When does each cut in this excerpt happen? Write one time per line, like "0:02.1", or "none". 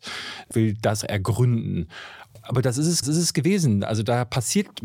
0:01.0
0:03.0